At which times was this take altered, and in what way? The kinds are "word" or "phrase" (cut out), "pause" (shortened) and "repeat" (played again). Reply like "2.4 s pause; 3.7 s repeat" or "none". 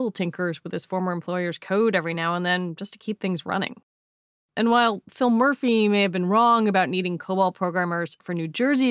none